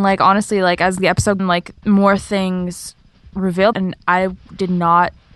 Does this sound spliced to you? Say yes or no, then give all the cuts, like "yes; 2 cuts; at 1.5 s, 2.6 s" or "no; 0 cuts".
yes; 3 cuts; at 1.4 s, 1.8 s, 3.7 s